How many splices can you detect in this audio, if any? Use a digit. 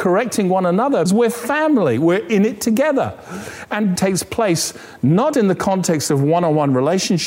3